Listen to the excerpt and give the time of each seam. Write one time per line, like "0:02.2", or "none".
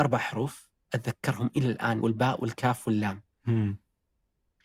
0:02.0
0:03.3